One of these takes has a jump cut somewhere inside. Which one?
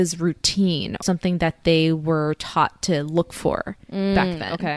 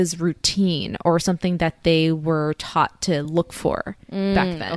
first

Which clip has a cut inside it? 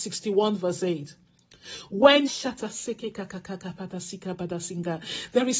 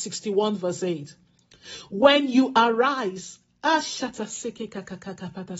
first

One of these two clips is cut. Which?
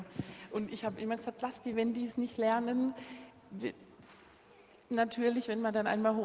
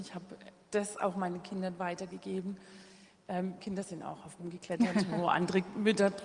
second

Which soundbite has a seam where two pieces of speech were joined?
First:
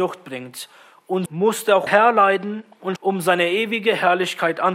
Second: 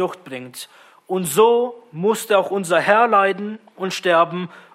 first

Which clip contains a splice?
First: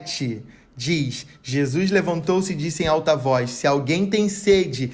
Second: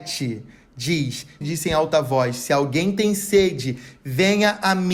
second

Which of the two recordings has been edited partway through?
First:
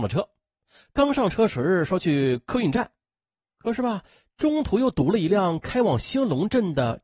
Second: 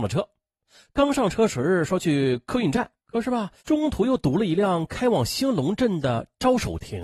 second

